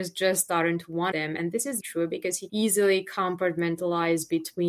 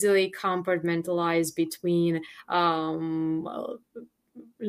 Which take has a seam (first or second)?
first